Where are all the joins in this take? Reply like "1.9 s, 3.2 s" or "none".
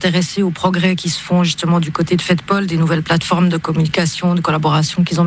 none